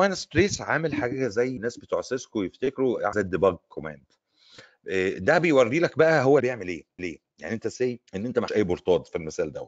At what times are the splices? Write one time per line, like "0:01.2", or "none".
0:01.6
0:03.1
0:06.4
0:07.0
0:08.1
0:08.5